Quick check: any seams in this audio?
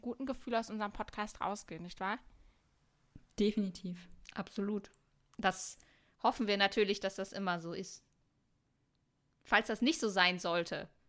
no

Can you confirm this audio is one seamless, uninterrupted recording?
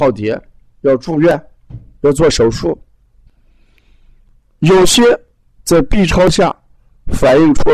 yes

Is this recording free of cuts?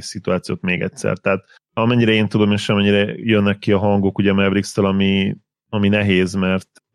yes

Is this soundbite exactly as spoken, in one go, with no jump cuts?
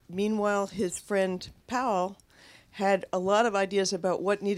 yes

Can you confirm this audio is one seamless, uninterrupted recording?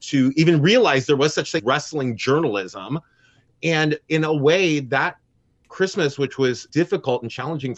no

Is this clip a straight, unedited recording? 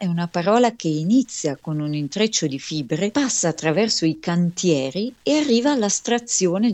yes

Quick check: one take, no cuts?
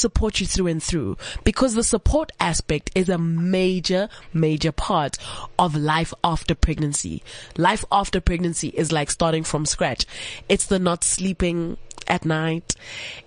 yes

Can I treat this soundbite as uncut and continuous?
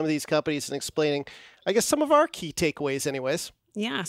yes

